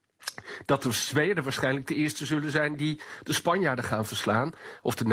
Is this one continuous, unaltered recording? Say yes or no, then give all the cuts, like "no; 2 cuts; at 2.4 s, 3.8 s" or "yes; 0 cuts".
yes; 0 cuts